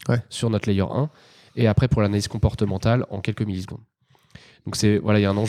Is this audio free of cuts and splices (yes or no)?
yes